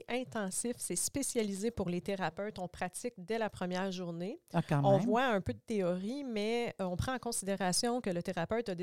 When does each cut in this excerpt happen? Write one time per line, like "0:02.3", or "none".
none